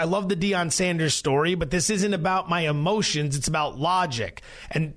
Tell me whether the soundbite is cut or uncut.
uncut